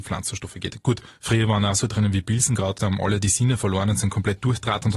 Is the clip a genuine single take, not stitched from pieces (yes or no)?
no